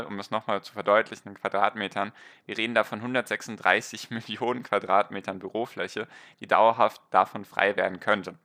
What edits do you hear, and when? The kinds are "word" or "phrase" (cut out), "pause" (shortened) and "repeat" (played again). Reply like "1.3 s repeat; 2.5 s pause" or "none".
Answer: none